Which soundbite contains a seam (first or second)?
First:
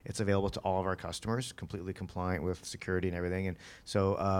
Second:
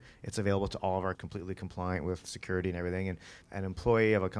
second